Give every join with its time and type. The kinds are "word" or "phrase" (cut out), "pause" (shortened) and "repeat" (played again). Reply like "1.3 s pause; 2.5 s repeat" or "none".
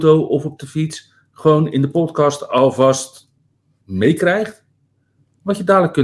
3.8 s word